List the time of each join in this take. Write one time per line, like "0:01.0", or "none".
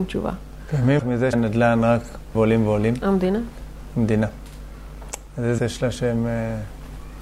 0:01.0
0:01.3
0:02.3
0:05.6